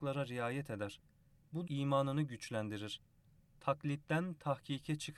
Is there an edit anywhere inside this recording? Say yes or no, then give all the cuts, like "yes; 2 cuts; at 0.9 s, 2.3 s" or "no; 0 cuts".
yes; 1 cut; at 1.7 s